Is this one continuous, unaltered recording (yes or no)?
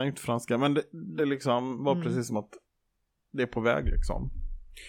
yes